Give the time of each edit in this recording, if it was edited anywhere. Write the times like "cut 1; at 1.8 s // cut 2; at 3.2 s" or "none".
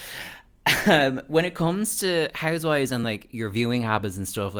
none